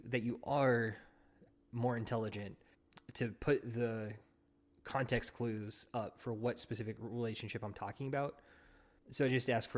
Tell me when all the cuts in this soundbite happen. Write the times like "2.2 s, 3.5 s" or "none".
none